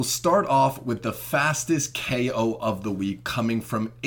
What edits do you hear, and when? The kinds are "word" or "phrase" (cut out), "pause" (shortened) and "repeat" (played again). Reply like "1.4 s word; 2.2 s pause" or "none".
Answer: none